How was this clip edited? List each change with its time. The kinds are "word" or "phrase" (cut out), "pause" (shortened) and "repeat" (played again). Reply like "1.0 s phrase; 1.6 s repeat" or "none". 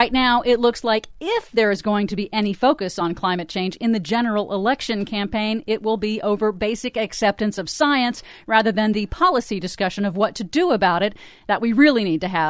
none